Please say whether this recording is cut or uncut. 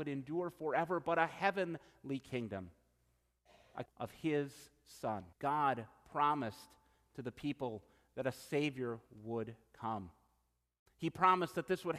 cut